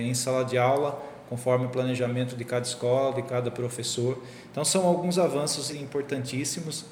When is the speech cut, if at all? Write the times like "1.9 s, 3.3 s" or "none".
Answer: 5.7 s

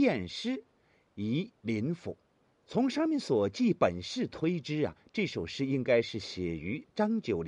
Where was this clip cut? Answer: 1.6 s, 2.5 s

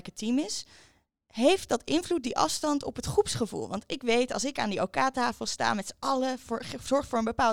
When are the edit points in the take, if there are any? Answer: none

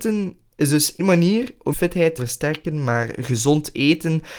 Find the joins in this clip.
1.0 s, 1.7 s, 2.2 s

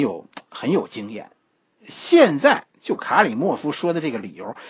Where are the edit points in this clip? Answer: none

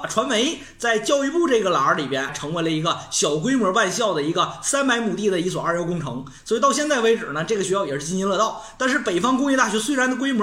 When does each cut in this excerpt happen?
2.3 s

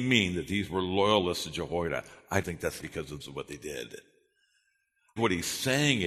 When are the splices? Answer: 2.4 s, 2.8 s, 3.2 s, 5.2 s

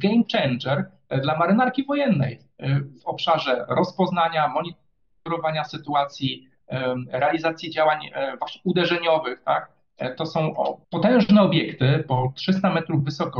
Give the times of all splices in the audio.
10.8 s

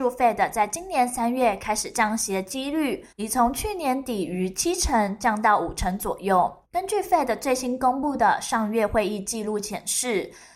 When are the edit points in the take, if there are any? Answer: 3.1 s, 6.6 s

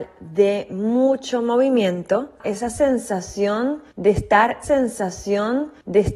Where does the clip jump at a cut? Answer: 2.4 s, 4.6 s

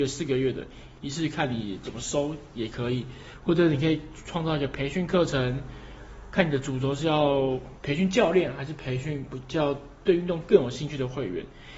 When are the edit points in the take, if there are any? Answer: 1.0 s

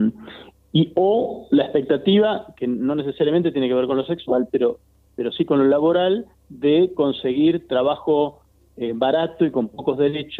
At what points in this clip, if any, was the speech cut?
none

